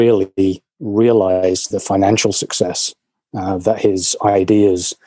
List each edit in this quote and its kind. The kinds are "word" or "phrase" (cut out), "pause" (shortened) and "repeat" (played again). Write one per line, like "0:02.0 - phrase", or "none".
0:01.7 - word